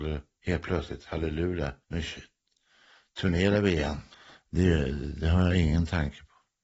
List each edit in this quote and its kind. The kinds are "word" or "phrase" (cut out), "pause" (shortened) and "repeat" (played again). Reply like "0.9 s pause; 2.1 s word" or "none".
1.8 s pause; 4.1 s pause